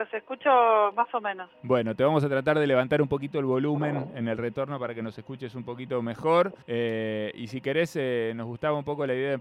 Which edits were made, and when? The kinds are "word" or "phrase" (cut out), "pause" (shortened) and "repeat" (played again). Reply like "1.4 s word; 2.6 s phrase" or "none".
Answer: 6.6 s pause

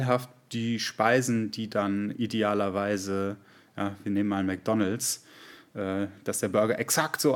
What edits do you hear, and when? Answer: none

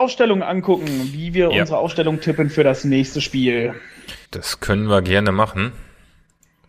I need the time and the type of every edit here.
4.3 s pause

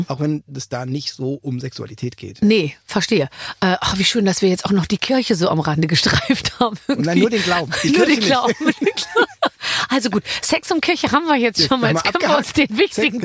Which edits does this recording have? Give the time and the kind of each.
none

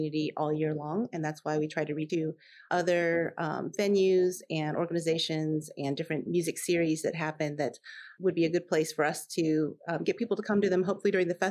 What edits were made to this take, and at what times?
2.1 s word; 6.3 s word

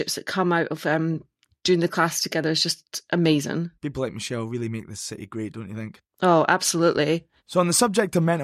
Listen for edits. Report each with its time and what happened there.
3.8 s pause; 7.4 s pause

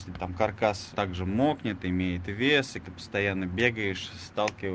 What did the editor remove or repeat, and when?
0.9 s word; 2.8 s word

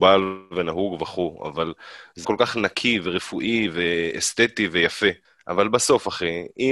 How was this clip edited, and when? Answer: 2.2 s word; 5.2 s pause

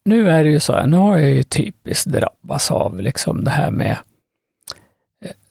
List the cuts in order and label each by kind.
none

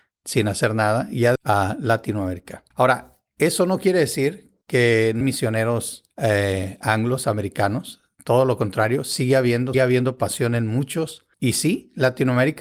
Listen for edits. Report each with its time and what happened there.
1.4 s word; 2.7 s pause; 4.6 s pause; 5.2 s word; 6.1 s pause; 9.7 s word; 11.3 s pause

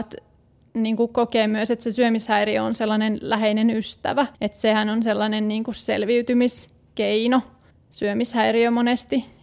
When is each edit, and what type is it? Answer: 4.3 s pause; 7.7 s pause

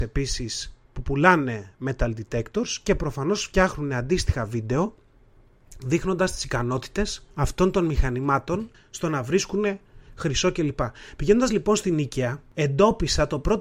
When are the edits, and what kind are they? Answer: 7.3 s pause; 8.7 s pause

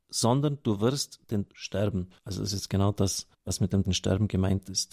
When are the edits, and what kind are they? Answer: 1.5 s word; 2.2 s pause; 3.3 s pause; 3.8 s word

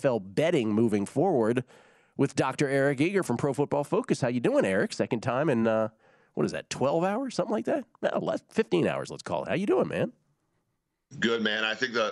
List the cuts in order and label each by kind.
none

